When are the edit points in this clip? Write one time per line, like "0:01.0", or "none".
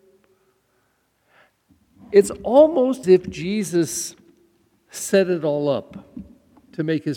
0:03.0